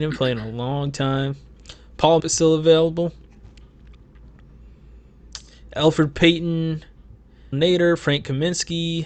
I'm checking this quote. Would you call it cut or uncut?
cut